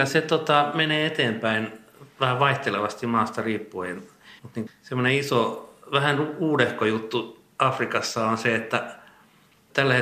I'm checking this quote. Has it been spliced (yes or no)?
yes